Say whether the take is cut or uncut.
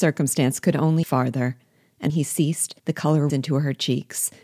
cut